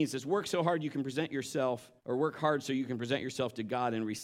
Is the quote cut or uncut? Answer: cut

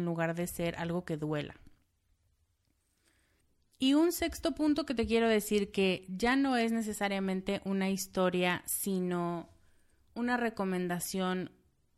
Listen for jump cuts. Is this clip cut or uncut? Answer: uncut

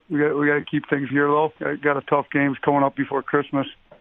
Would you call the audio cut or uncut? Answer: cut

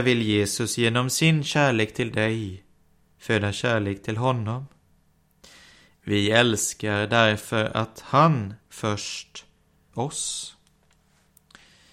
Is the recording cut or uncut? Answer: cut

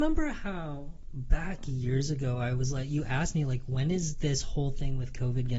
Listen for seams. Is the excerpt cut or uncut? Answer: uncut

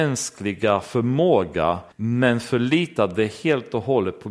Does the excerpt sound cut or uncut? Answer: cut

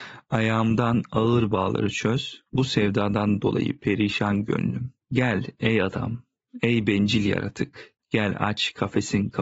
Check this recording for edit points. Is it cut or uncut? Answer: cut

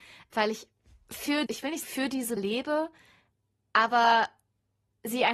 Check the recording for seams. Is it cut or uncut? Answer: cut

